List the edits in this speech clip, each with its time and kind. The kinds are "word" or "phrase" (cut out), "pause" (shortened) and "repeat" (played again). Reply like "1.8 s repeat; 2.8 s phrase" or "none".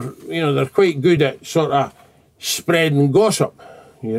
none

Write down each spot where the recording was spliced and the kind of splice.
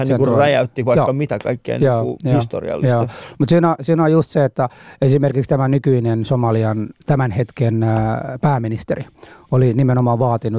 none

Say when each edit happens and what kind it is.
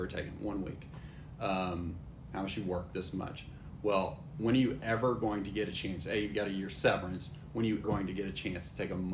7.8 s word

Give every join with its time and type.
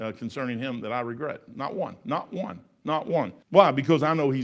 3.4 s pause

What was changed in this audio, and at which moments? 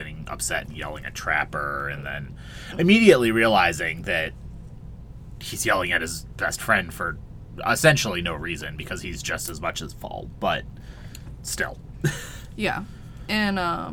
none

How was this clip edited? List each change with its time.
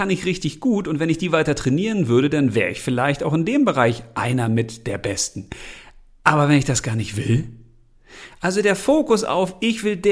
none

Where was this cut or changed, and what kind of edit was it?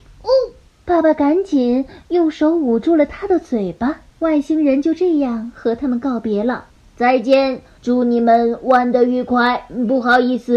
4.1 s pause; 6.7 s pause; 7.8 s pause

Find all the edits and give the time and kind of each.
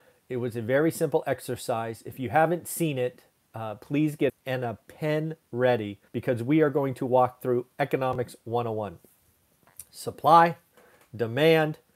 4.3 s phrase; 6.1 s pause

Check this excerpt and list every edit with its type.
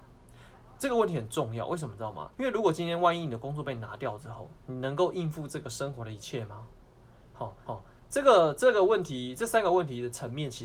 2.3 s pause; 4.6 s pause; 7.7 s repeat

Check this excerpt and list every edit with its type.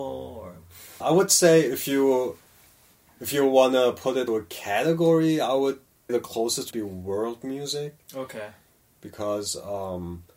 1.0 s word; 4.3 s word; 6.1 s word; 6.7 s word

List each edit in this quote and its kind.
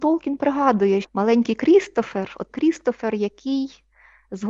1.0 s word; 2.5 s phrase

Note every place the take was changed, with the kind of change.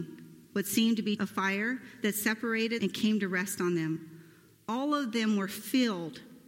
1.2 s word; 2.8 s word

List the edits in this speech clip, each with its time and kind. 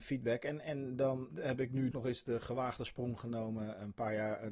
1.3 s word; 1.9 s word

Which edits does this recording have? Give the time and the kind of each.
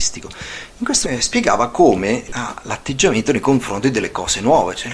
1.0 s word; 2.3 s word

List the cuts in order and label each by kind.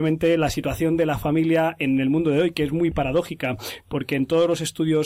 none

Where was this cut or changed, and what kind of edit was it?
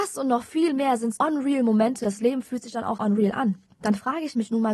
1.2 s word; 2.0 s word; 3.0 s word

